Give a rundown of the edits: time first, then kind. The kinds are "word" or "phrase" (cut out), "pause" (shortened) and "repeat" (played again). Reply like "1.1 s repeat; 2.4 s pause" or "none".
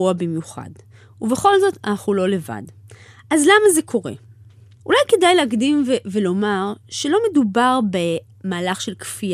none